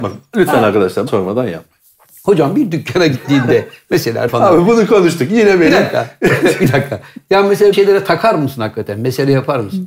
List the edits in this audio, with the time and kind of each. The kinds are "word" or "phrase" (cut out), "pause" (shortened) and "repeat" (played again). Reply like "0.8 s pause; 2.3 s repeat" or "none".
1.1 s word; 4.3 s word; 7.7 s word